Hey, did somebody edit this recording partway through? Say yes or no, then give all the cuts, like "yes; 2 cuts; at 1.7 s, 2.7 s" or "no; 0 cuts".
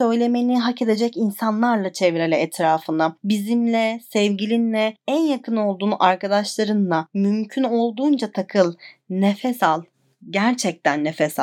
no; 0 cuts